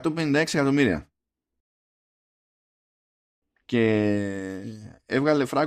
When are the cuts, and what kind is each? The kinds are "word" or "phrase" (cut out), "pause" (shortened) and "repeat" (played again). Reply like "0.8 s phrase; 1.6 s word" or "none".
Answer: none